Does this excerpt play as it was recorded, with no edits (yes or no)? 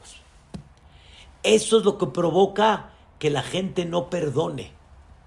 yes